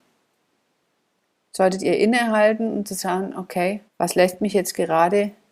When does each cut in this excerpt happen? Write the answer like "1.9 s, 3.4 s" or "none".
3.9 s